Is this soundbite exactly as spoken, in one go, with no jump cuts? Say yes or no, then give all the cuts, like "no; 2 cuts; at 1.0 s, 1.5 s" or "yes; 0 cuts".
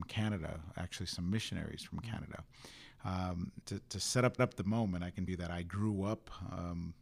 no; 3 cuts; at 3.6 s, 4.4 s, 5.3 s